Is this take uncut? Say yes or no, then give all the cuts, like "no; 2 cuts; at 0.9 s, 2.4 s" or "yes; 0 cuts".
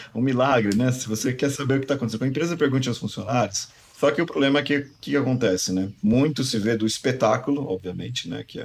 yes; 0 cuts